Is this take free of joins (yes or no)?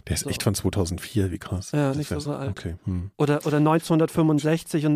no